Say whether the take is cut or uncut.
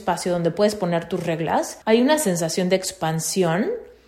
cut